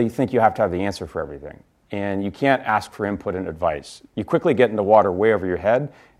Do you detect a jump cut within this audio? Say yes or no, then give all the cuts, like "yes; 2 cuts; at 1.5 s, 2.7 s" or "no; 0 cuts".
no; 0 cuts